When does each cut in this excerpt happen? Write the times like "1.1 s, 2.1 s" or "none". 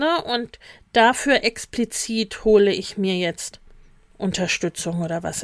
none